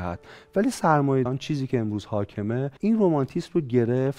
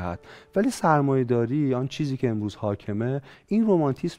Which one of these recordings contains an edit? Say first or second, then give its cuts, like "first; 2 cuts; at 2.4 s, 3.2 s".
first; 2 cuts; at 1.3 s, 2.8 s